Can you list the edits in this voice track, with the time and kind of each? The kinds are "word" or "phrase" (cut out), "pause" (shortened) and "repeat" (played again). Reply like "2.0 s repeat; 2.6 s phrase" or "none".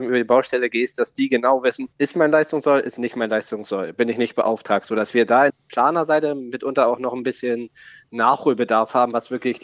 1.9 s pause; 5.5 s word